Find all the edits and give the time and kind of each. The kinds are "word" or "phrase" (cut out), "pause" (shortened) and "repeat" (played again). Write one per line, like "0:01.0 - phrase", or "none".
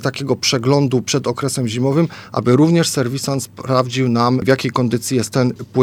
none